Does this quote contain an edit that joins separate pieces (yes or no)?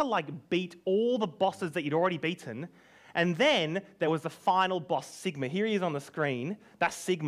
no